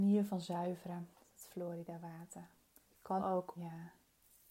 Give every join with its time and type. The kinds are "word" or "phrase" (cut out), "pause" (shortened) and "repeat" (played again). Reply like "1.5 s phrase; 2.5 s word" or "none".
1.1 s pause; 2.8 s pause; 3.2 s word; 3.6 s word